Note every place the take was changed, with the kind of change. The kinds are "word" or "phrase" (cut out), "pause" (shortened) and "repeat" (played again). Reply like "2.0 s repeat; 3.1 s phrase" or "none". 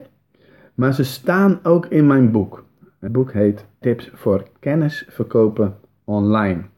3.1 s word; 3.8 s word